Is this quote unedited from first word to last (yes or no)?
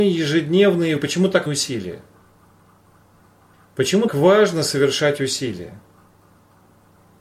no